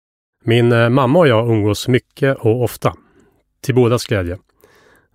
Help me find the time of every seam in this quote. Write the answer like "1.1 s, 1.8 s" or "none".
none